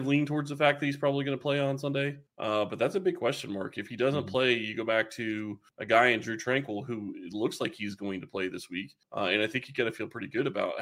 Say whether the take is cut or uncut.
cut